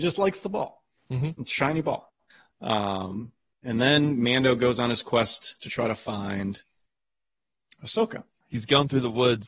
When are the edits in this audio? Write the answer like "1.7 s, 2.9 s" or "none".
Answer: 2.3 s